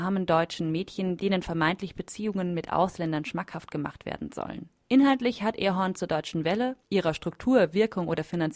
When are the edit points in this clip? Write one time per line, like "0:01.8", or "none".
0:04.8
0:06.8